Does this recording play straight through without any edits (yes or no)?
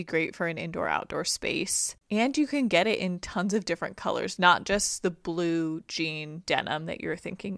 no